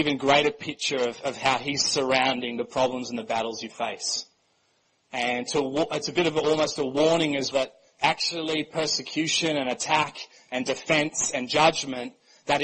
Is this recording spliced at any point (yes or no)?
yes